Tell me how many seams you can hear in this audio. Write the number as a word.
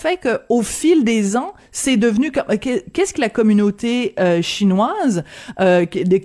one